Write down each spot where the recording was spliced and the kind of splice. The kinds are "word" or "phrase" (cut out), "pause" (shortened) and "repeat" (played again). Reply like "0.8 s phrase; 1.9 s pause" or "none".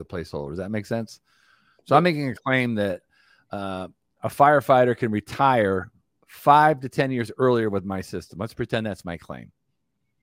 none